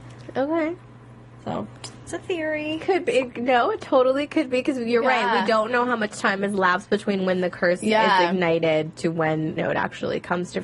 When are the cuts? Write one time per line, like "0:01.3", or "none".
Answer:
0:02.1
0:09.6